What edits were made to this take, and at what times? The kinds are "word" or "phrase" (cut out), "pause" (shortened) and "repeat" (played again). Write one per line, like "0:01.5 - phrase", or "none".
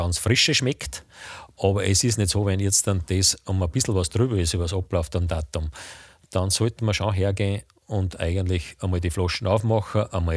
none